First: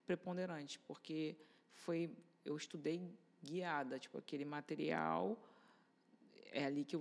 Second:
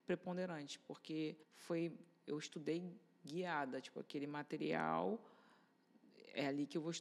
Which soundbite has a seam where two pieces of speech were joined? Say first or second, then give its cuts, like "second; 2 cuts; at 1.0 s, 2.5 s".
second; 1 cut; at 1.4 s